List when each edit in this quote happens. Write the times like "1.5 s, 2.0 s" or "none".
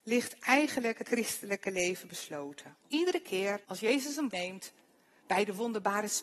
1.0 s, 2.8 s, 3.6 s, 4.3 s